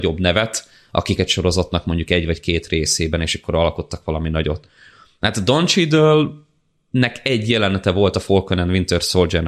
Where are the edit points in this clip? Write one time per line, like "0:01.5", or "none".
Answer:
0:01.2